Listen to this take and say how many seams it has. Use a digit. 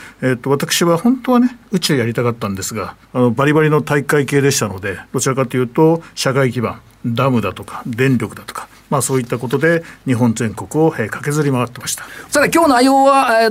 2